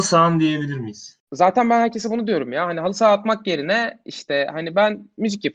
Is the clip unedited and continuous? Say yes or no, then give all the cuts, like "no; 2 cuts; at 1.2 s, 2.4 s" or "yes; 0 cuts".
no; 1 cut; at 1.2 s